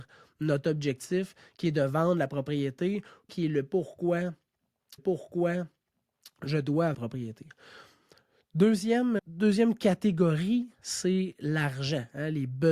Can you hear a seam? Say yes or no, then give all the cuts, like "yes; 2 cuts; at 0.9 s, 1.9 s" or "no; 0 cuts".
yes; 4 cuts; at 3.3 s, 5.0 s, 6.9 s, 9.2 s